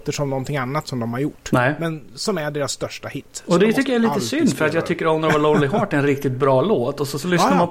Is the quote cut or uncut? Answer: uncut